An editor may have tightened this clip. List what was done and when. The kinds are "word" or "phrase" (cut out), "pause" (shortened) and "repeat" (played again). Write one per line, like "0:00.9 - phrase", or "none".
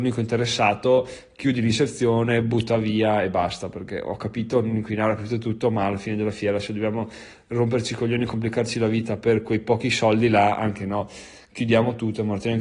none